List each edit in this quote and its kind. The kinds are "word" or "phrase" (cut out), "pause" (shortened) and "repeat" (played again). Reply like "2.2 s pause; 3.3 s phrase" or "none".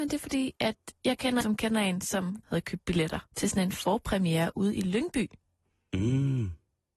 1.0 s pause; 1.4 s word; 2.4 s phrase; 3.3 s pause